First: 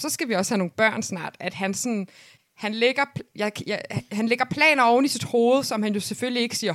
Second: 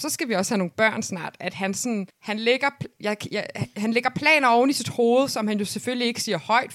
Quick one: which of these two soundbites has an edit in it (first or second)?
second